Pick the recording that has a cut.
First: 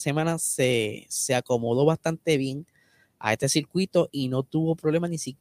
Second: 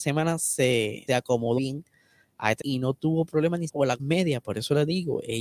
second; 5 cuts; at 1.1 s, 1.6 s, 2.6 s, 3.7 s, 4.0 s

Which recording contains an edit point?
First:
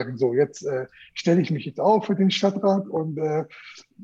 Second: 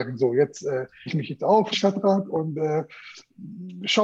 second; 2 cuts; at 1.1 s, 1.7 s

